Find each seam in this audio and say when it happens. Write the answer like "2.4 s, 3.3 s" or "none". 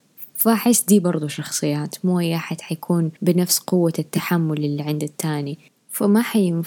3.2 s